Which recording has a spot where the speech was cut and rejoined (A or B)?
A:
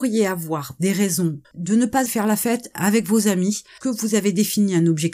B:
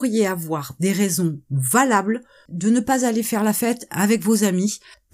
A